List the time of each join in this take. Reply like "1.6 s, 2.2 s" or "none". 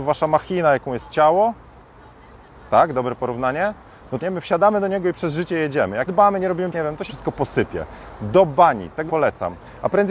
4.2 s, 6.1 s, 6.7 s, 7.1 s, 9.1 s